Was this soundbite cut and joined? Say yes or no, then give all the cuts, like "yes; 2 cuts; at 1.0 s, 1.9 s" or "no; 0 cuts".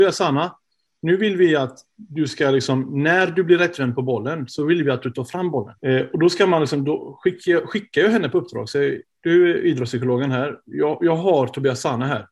yes; 1 cut; at 5.8 s